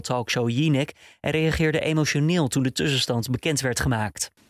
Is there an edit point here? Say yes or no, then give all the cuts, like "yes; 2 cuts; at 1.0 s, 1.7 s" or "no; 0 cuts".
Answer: no; 0 cuts